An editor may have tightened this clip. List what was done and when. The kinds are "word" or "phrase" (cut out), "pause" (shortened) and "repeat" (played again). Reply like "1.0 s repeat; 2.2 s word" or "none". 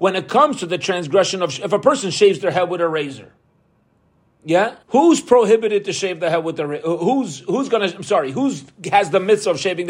4.8 s pause